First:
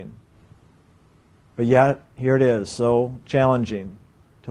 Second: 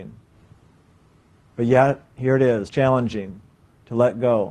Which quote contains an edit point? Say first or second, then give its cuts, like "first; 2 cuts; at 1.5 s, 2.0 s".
second; 1 cut; at 2.7 s